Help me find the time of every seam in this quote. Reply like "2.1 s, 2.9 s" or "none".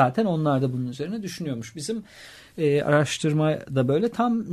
none